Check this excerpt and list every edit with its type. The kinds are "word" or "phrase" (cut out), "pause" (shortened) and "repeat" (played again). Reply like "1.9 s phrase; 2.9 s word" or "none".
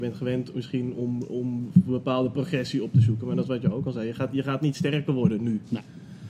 none